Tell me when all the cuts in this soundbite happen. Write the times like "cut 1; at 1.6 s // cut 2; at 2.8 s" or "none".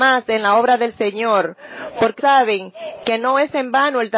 cut 1; at 2.2 s